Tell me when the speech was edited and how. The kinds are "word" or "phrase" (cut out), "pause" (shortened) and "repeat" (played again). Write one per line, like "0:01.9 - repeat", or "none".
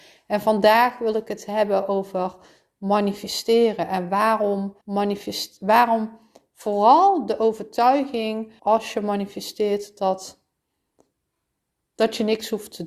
0:04.8 - pause
0:08.6 - phrase